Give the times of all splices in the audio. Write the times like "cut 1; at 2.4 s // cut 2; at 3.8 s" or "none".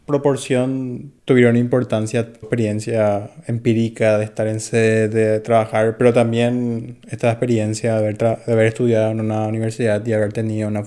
cut 1; at 1.2 s // cut 2; at 2.4 s